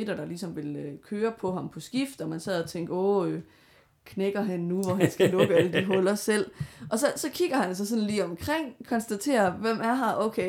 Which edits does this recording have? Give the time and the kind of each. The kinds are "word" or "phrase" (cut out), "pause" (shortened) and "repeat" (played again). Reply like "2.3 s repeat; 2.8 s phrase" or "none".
none